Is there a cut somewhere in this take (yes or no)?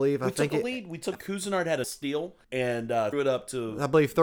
yes